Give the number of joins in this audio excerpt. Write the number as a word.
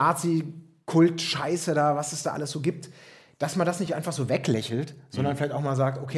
zero